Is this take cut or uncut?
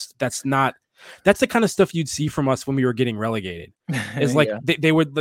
uncut